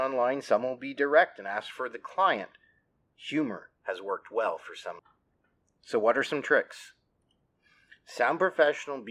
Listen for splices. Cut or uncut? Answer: uncut